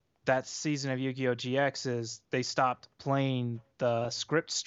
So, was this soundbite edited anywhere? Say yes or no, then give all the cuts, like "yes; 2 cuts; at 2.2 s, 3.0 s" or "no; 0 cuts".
yes; 1 cut; at 2.2 s